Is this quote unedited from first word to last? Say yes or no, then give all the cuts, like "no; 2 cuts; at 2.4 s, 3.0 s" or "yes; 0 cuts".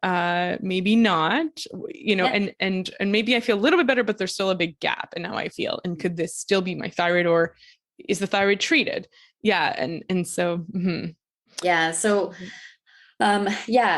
yes; 0 cuts